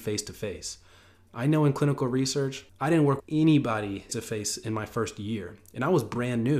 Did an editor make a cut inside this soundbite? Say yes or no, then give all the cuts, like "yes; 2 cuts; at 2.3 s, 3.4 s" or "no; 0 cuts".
yes; 3 cuts; at 2.7 s, 3.2 s, 4.1 s